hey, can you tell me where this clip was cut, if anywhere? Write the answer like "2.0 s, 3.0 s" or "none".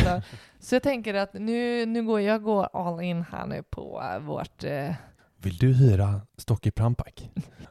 6.3 s